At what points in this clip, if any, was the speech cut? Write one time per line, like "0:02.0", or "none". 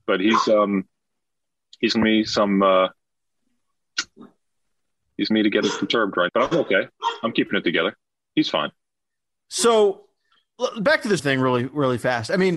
0:01.9
0:05.3
0:05.6
0:06.3
0:11.2